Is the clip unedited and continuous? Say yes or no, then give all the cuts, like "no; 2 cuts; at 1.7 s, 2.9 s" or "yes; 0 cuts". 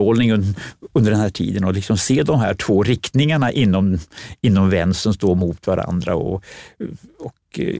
yes; 0 cuts